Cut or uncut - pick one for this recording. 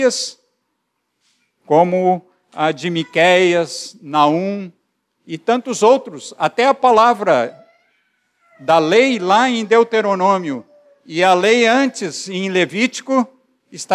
uncut